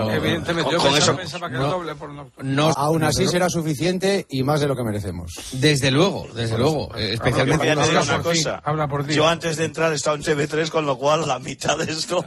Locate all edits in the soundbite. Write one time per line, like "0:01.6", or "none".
0:01.1
0:02.7
0:07.6
0:11.2